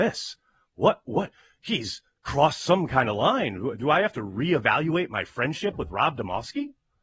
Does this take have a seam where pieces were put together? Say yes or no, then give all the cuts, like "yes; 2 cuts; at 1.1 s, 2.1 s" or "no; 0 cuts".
no; 0 cuts